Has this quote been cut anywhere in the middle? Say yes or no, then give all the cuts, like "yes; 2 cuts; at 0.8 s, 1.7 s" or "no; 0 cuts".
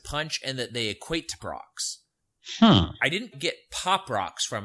yes; 2 cuts; at 1.4 s, 3.3 s